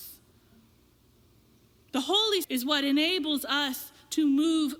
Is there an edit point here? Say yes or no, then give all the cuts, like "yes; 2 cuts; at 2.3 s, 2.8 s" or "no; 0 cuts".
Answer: yes; 1 cut; at 2.4 s